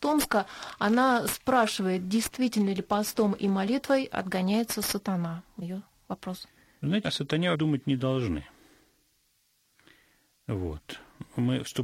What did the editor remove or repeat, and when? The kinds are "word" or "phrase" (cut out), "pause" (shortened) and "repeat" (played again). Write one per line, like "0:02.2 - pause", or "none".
0:05.6 - word
0:07.0 - word
0:07.5 - word